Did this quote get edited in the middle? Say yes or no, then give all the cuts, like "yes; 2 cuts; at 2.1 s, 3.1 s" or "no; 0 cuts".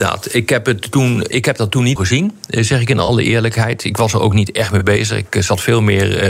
yes; 2 cuts; at 1.3 s, 2.0 s